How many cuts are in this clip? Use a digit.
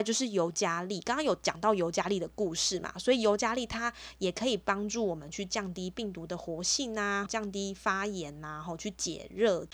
1